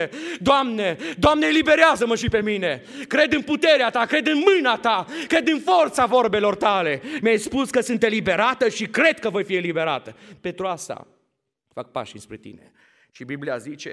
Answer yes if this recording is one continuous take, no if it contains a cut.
yes